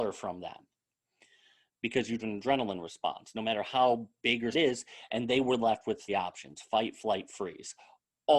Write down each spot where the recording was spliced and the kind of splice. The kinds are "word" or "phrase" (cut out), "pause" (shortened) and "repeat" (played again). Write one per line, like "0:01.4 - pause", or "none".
0:02.2 - word
0:04.5 - word
0:06.1 - word